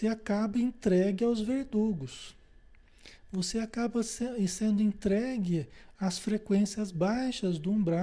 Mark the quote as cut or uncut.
uncut